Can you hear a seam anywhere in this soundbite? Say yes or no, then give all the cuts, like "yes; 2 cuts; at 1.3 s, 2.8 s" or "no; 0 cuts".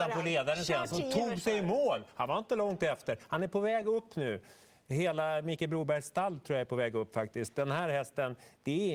no; 0 cuts